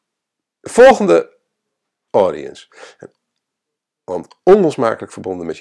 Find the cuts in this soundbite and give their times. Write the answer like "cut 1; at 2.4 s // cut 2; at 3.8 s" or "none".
cut 1; at 2.1 s